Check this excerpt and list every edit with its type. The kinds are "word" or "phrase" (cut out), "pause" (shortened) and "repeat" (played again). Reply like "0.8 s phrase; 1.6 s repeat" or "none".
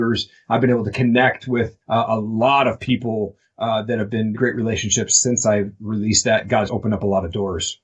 1.8 s pause; 4.3 s word; 6.7 s word